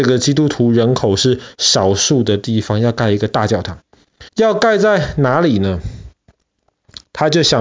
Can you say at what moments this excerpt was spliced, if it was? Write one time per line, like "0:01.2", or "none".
0:04.3

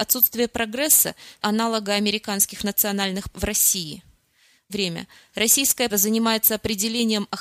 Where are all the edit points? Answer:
0:01.4
0:03.3
0:04.7
0:05.9

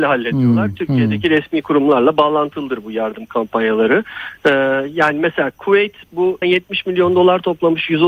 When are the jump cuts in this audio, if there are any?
0:06.4

